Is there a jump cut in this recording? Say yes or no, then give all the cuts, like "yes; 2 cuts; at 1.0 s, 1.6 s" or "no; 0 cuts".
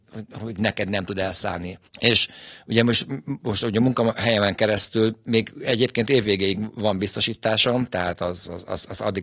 yes; 1 cut; at 1.9 s